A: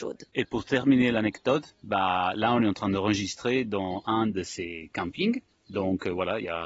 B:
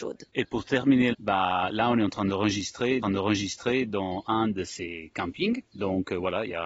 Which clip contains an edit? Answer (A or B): B